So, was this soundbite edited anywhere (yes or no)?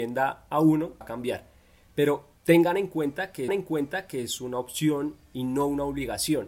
yes